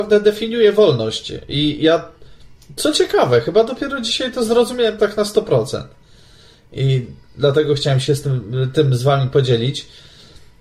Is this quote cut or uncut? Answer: uncut